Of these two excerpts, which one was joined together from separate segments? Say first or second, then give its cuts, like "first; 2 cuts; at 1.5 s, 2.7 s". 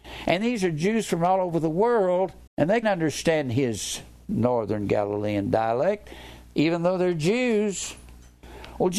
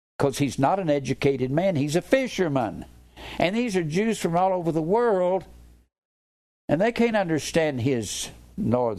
first; 2 cuts; at 2.5 s, 2.8 s